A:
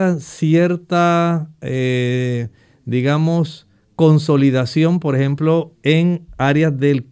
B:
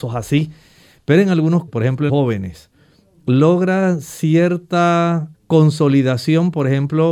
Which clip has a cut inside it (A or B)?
B